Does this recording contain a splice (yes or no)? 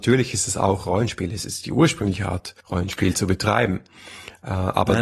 yes